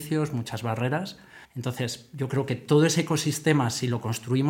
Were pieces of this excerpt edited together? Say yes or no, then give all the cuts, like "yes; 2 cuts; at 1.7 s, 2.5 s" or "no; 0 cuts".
yes; 1 cut; at 1.4 s